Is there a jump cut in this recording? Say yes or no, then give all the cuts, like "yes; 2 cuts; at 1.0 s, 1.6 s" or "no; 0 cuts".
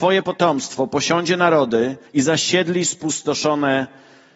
yes; 1 cut; at 2.1 s